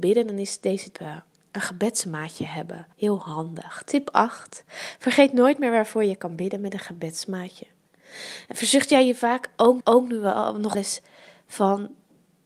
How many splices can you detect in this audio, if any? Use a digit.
5